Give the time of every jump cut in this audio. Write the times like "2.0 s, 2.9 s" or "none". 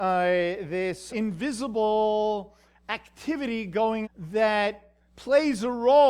1.1 s, 4.0 s